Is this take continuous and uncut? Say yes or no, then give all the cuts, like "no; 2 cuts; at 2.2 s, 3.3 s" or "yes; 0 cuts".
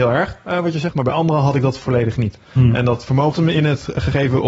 no; 1 cut; at 3.3 s